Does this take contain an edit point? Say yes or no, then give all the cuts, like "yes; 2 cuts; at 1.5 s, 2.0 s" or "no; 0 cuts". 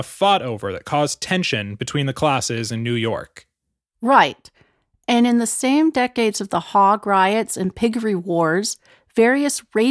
no; 0 cuts